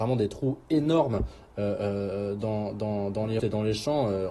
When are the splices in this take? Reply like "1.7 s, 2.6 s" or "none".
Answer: 3.4 s